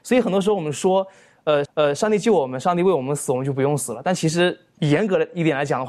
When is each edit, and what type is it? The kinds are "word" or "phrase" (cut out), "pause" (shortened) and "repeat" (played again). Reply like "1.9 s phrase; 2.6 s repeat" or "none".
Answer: 1.7 s repeat